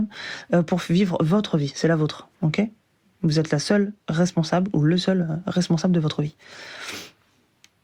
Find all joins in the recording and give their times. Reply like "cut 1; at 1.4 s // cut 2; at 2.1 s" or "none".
cut 1; at 2.3 s